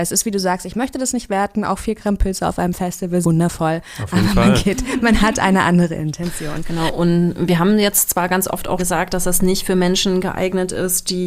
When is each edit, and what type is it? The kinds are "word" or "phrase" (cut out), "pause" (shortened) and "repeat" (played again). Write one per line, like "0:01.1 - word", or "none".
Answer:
0:03.2 - word
0:08.8 - word